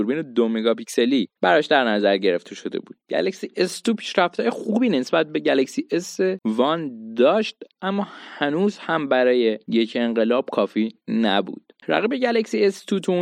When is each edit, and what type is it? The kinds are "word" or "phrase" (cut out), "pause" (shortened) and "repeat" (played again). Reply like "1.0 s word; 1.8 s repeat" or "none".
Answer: 1.4 s pause; 3.0 s pause; 7.7 s pause; 11.8 s pause